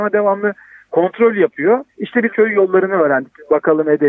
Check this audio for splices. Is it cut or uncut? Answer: cut